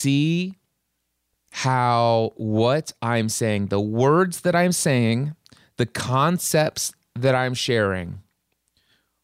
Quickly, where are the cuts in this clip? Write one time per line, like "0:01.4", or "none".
none